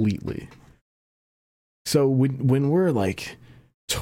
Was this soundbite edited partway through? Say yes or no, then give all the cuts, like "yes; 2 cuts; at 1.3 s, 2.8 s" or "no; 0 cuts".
no; 0 cuts